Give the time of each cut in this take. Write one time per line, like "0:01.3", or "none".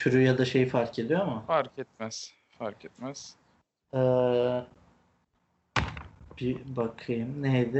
none

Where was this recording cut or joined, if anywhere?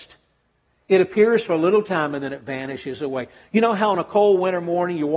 none

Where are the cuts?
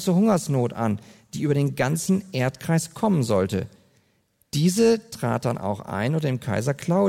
none

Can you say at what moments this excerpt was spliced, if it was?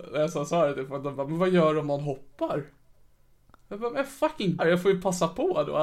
0:04.6

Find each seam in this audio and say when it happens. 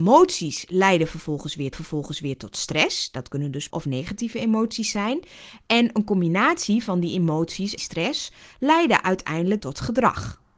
0:01.7
0:03.7
0:07.8
0:09.6

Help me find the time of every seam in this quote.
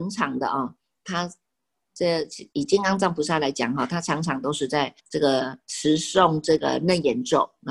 0:05.0
0:05.6

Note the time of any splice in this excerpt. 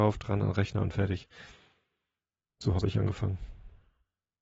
none

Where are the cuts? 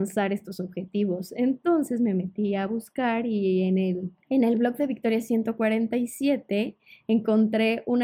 0:04.2

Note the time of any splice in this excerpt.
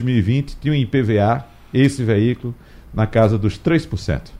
none

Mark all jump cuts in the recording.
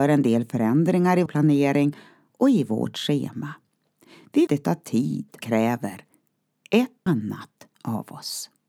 0:01.3
0:04.5
0:05.4
0:07.1

